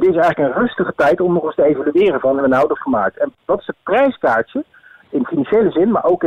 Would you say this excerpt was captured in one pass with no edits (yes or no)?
no